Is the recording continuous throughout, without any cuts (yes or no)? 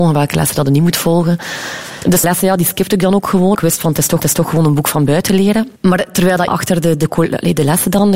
no